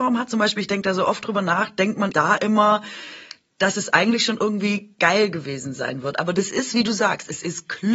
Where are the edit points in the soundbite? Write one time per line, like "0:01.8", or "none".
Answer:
0:02.1

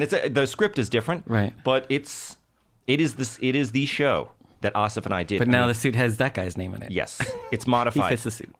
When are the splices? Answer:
none

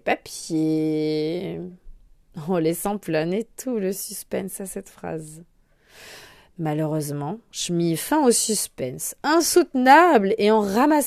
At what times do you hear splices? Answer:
none

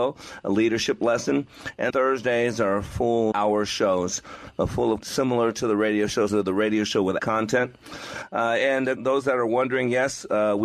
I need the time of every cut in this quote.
0:01.9
0:03.3
0:05.0
0:06.3
0:07.2
0:09.0

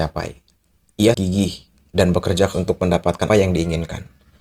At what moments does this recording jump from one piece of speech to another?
0:01.1
0:02.5
0:03.3

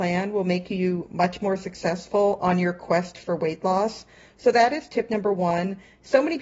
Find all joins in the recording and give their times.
none

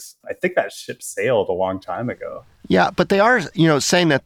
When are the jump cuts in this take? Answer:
none

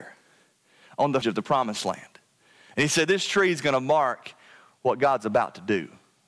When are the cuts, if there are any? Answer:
0:01.2

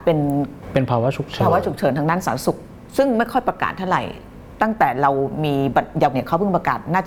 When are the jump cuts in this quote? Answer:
0:06.1

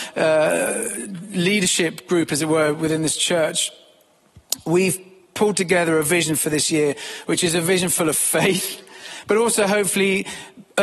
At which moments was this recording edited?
none

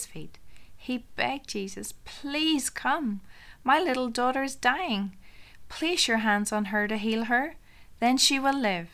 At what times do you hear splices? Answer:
none

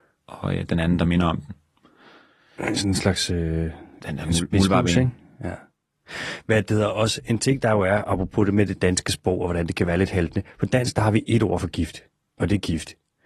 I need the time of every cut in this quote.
none

